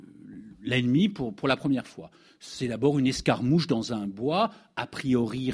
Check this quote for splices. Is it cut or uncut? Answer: uncut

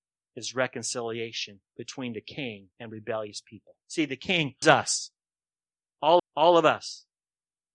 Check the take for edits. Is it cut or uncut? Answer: cut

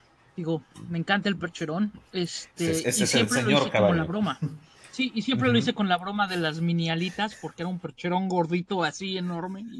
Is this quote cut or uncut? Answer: cut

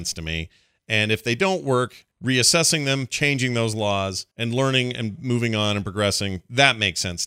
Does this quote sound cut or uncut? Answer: cut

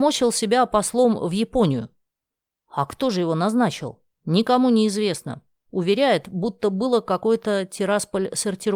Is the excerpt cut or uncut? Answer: cut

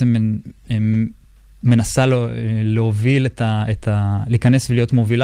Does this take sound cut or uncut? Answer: uncut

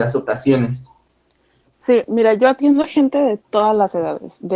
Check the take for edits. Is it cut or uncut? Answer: uncut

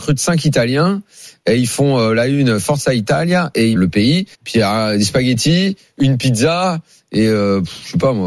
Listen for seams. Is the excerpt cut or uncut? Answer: cut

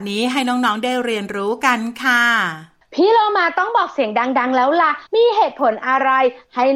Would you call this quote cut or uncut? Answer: cut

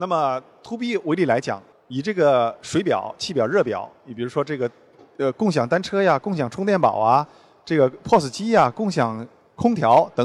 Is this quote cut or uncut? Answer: uncut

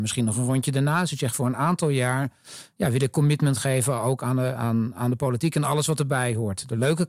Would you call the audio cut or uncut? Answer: uncut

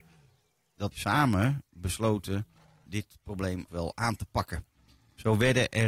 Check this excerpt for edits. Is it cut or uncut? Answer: cut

